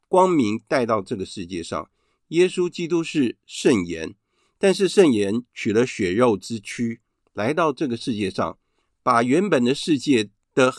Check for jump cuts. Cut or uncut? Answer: uncut